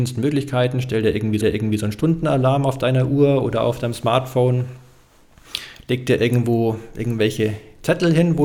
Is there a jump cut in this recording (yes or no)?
yes